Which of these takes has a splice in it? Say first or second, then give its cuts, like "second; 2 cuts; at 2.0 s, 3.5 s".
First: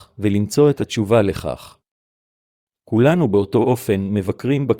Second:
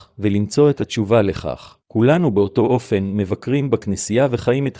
second; 1 cut; at 1.8 s